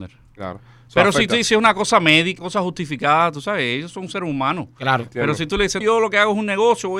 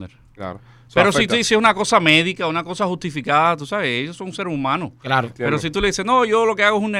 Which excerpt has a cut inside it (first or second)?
first